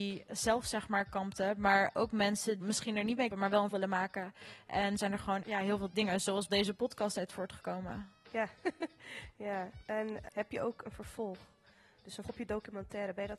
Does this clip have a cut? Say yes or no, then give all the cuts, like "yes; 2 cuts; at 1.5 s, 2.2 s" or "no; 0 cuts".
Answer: yes; 9 cuts; at 2.6 s, 3.3 s, 3.7 s, 5.0 s, 5.4 s, 5.9 s, 6.5 s, 10.3 s, 12.2 s